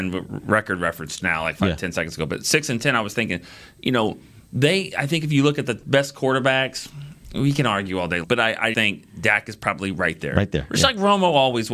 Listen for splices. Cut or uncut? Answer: cut